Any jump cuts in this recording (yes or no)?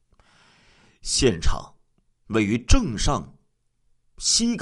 no